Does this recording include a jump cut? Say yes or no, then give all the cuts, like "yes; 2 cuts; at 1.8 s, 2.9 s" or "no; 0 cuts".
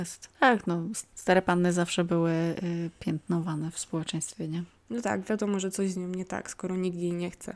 no; 0 cuts